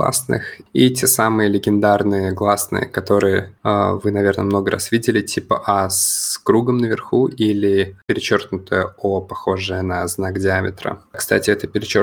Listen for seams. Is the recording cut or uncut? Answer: uncut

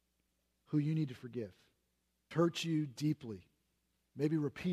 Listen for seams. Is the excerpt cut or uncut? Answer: cut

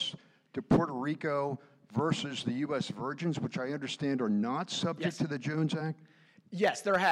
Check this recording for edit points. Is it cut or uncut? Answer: uncut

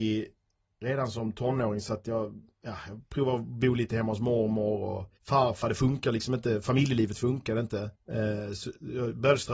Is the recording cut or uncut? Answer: cut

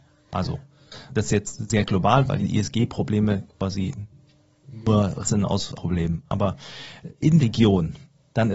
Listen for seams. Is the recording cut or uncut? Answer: cut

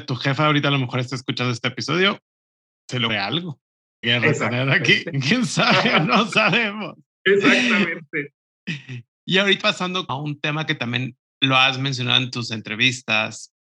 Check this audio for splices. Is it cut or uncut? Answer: cut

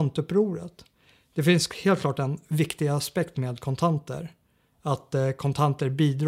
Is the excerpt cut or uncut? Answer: uncut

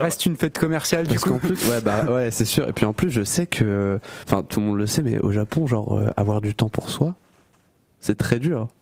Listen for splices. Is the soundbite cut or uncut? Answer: uncut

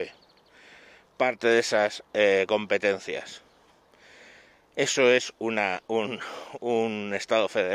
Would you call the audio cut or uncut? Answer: uncut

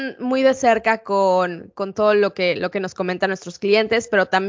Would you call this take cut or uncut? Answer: uncut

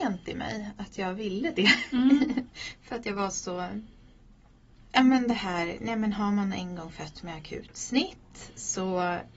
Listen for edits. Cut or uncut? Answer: uncut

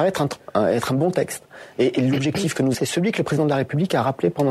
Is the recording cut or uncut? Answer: cut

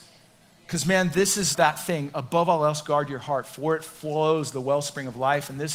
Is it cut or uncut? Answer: cut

